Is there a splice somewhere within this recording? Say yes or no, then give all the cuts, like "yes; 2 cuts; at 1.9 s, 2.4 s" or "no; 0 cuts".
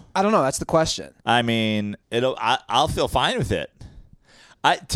yes; 2 cuts; at 1.2 s, 2.0 s